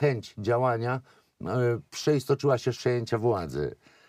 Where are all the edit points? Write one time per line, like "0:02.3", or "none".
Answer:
0:01.9
0:02.7